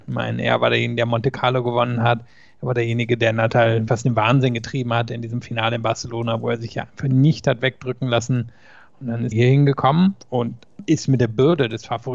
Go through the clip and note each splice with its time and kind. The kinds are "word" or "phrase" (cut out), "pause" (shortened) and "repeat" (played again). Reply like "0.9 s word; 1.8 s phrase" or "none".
3.9 s word; 9.3 s word